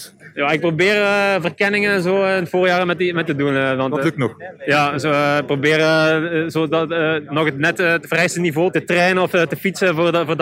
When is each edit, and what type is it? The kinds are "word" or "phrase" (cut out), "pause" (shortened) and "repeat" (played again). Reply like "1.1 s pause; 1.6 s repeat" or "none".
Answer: 3.3 s phrase